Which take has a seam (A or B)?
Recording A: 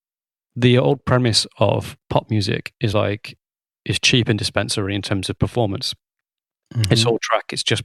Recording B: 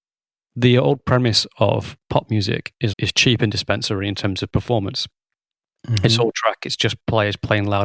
B